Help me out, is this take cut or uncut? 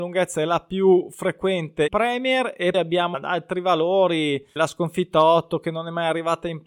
cut